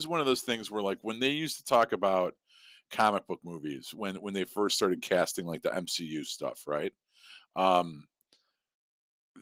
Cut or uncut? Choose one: uncut